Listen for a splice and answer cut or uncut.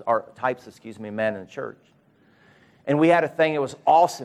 uncut